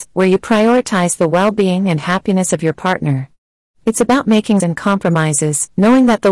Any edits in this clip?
yes; 1 cut; at 4.6 s

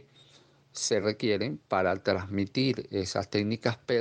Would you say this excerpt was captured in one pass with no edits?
yes; 0 cuts

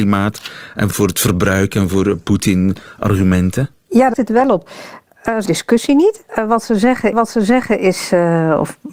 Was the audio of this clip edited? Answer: yes; 6 cuts; at 0.9 s, 3.8 s, 4.1 s, 5.5 s, 6.3 s, 7.1 s

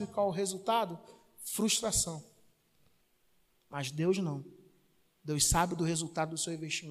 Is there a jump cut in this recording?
yes; 1 cut; at 3.0 s

